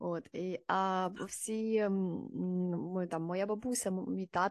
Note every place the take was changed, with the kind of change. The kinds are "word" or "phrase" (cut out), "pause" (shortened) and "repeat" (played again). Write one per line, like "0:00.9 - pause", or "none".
none